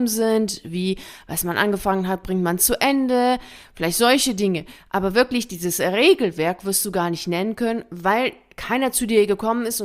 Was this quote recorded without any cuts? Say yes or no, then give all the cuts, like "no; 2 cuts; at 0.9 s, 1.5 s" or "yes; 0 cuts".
yes; 0 cuts